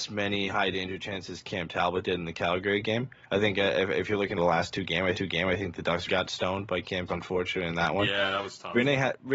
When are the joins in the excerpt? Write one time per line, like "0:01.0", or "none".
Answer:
0:04.4
0:05.1
0:06.1
0:07.1